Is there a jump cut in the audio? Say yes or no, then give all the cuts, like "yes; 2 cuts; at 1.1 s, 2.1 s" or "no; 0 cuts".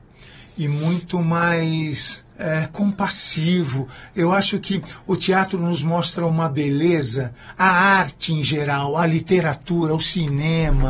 yes; 2 cuts; at 2.3 s, 9.0 s